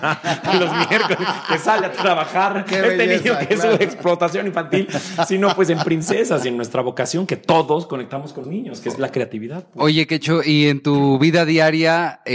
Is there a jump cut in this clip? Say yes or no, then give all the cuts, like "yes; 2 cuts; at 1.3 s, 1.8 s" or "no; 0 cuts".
yes; 1 cut; at 8.4 s